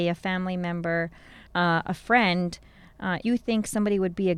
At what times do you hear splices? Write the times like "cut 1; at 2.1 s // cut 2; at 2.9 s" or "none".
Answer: cut 1; at 1.5 s // cut 2; at 3.2 s

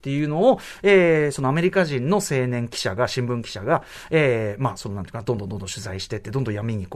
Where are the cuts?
none

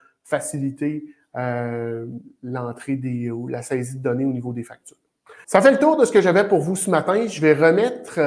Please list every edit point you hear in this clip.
cut 1; at 5.4 s

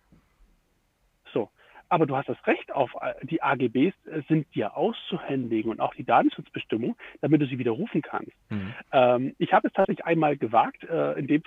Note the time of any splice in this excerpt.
none

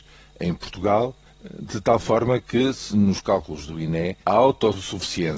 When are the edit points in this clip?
cut 1; at 4.2 s

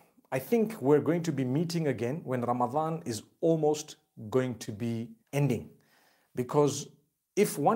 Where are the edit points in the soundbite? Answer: cut 1; at 5.2 s

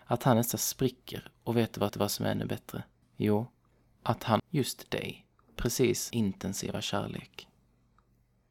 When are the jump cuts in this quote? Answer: cut 1; at 1.9 s // cut 2; at 3.0 s // cut 3; at 4.4 s // cut 4; at 5.6 s // cut 5; at 6.1 s

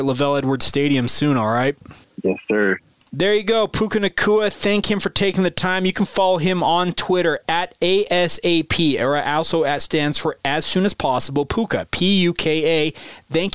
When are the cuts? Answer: none

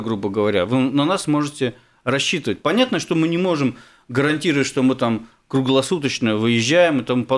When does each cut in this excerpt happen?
none

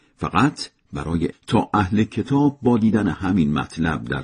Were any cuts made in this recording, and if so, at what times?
cut 1; at 1.3 s

